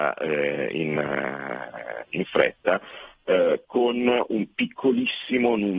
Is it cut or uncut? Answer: cut